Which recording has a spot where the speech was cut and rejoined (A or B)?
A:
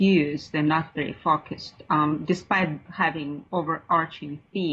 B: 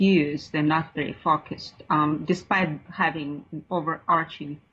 A